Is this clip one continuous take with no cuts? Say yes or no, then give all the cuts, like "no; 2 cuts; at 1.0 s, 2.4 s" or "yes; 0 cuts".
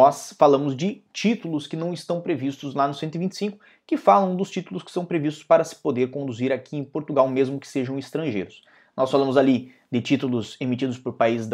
yes; 0 cuts